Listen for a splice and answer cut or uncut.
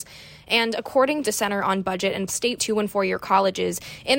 cut